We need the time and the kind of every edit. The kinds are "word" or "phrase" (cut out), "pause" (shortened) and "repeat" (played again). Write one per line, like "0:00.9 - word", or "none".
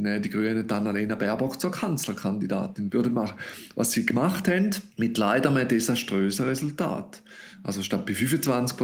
0:04.9 - pause